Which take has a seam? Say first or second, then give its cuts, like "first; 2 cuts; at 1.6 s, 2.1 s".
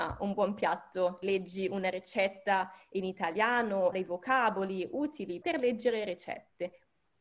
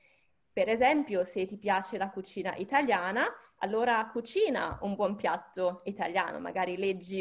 first; 3 cuts; at 1.2 s, 3.9 s, 5.4 s